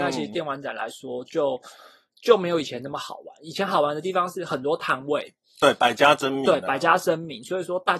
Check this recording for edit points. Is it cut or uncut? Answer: uncut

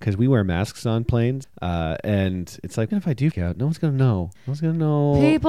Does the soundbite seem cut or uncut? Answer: cut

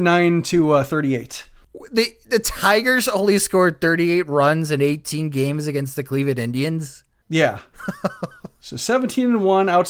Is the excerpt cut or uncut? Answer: uncut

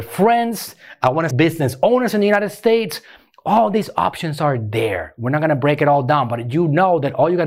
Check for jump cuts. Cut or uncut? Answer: cut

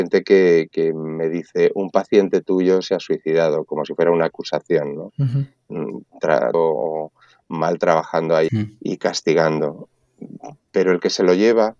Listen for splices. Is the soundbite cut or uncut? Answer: cut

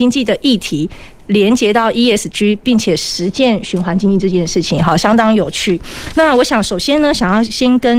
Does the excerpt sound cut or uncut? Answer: uncut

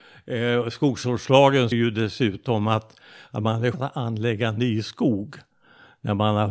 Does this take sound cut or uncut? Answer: cut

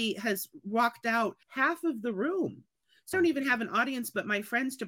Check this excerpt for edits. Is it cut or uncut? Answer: cut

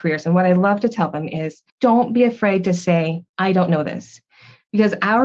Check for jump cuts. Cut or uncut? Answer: cut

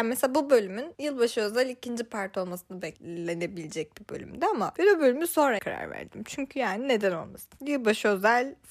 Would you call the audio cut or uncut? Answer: cut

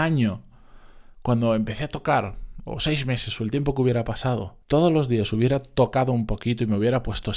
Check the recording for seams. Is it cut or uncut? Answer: cut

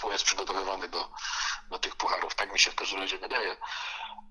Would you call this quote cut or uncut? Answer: uncut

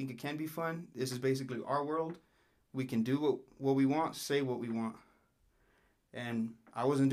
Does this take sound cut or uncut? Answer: uncut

